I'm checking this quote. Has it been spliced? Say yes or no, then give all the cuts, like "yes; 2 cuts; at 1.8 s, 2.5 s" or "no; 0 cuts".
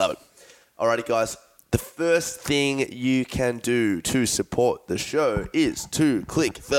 no; 0 cuts